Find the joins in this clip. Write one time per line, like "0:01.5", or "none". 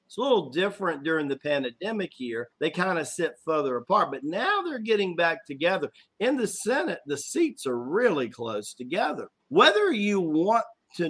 0:02.5
0:09.4